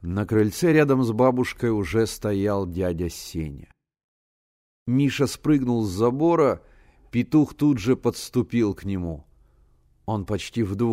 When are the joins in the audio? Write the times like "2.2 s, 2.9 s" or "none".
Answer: none